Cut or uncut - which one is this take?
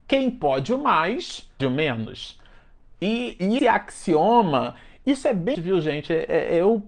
cut